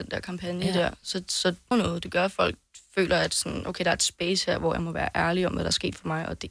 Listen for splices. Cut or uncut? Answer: cut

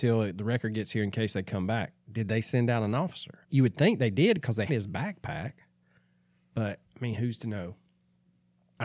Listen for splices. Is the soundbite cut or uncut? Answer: cut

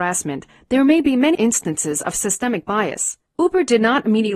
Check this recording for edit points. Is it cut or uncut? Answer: cut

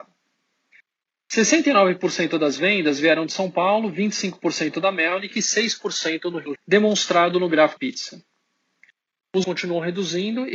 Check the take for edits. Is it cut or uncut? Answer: cut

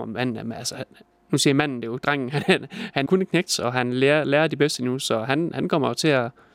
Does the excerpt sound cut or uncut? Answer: cut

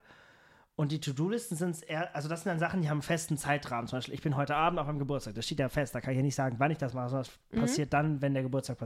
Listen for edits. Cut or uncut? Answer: uncut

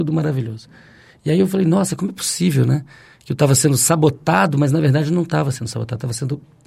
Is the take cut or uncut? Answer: uncut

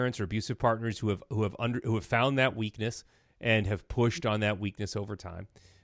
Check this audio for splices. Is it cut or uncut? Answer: uncut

